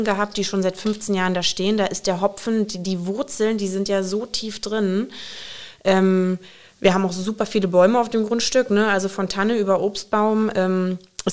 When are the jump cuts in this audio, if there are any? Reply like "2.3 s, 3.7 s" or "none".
none